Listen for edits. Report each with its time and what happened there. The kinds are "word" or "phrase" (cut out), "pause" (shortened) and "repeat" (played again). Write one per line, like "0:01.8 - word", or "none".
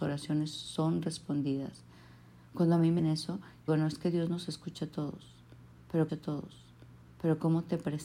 0:03.0 - word
0:03.7 - word
0:06.1 - repeat